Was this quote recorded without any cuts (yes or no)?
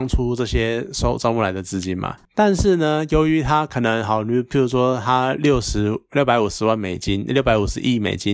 yes